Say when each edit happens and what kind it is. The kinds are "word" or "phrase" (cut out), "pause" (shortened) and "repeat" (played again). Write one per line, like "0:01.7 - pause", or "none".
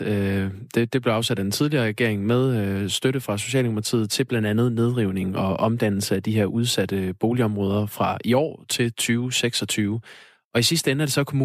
none